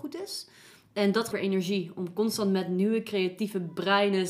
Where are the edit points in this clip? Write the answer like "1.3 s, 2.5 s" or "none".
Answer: 1.3 s